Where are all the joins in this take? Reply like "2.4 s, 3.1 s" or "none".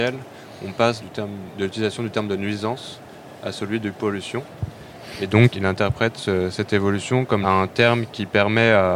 1.0 s, 5.5 s, 7.4 s